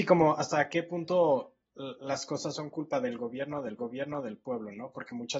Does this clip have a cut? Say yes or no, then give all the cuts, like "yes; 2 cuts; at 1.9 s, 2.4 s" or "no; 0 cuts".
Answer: yes; 1 cut; at 3.8 s